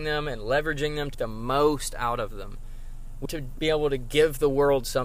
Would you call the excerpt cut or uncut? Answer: cut